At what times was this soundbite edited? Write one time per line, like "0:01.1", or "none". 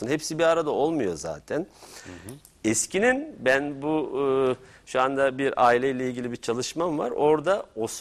none